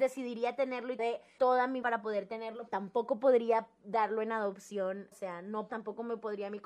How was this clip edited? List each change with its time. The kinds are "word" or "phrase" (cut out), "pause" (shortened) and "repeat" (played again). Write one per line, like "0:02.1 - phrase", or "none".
0:01.0 - word
0:01.4 - word
0:01.8 - word
0:02.7 - word
0:05.1 - word
0:05.7 - word